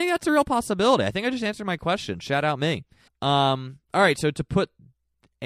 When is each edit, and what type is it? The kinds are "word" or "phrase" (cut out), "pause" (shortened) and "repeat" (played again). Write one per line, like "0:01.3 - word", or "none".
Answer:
0:03.1 - pause